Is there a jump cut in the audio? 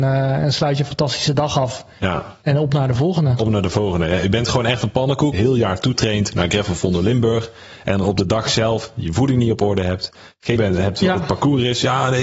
yes; 2 cuts; at 5.3 s, 10.6 s

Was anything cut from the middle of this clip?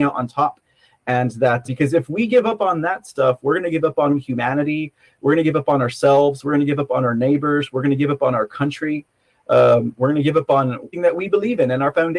yes; 3 cuts; at 1.6 s, 4.1 s, 10.9 s

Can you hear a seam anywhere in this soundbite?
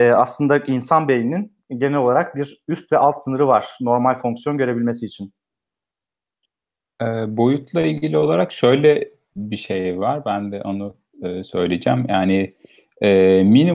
no; 0 cuts

